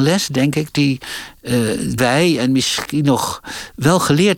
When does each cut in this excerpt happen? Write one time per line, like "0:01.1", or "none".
0:02.0